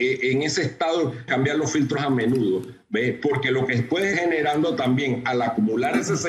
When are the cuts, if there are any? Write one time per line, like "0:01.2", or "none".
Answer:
0:01.3
0:02.0
0:04.1